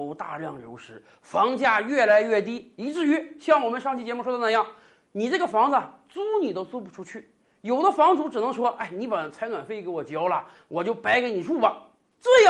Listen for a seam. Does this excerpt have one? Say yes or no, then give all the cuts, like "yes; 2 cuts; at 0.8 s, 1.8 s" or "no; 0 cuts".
no; 0 cuts